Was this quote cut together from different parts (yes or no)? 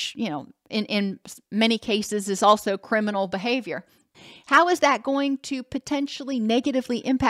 yes